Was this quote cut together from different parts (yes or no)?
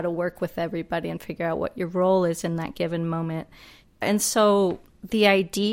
no